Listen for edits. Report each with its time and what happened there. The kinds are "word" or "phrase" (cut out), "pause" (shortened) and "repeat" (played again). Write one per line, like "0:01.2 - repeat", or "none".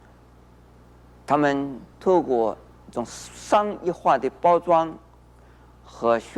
0:01.9 - pause